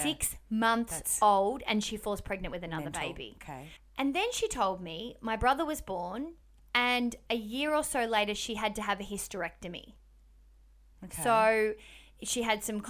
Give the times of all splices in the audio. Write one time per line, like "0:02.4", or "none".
none